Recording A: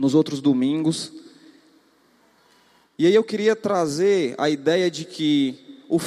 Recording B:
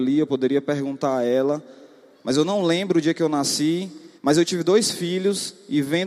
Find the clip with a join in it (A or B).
B